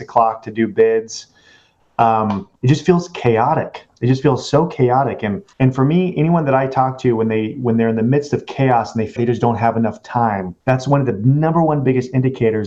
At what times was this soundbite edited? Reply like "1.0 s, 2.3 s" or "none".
2.5 s, 5.5 s, 9.2 s, 10.6 s